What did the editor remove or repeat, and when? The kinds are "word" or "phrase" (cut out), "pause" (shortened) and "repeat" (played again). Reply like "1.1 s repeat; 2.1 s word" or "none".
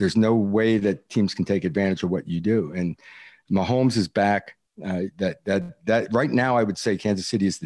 none